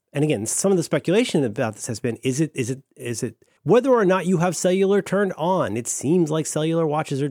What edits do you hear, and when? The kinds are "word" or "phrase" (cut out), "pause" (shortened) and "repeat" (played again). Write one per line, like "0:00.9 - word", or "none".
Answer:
0:03.6 - pause

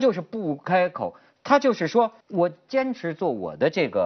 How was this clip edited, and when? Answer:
0:02.2 - pause

